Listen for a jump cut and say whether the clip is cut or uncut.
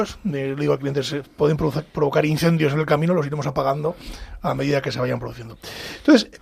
uncut